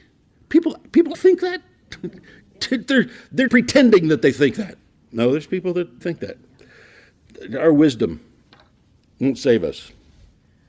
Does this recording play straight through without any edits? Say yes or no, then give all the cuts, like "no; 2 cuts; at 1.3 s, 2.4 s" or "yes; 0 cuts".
no; 4 cuts; at 1.1 s, 3.5 s, 4.9 s, 6.0 s